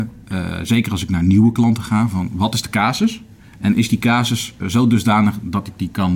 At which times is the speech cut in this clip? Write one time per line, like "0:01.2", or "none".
0:04.6